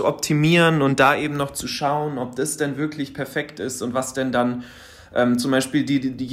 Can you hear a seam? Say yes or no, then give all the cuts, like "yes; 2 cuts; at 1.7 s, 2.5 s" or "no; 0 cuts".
no; 0 cuts